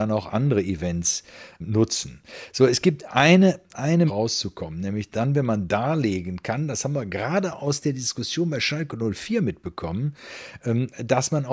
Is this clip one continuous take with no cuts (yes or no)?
no